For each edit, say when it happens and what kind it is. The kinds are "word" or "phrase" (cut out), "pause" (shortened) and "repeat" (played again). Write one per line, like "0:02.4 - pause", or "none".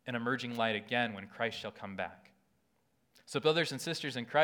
none